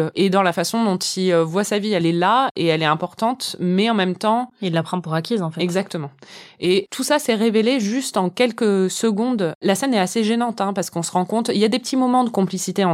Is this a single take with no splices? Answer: yes; 0 cuts

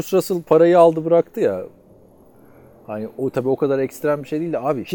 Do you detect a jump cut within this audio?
no; 0 cuts

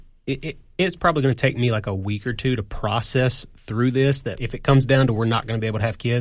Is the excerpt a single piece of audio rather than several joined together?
no; 1 cut; at 4.4 s

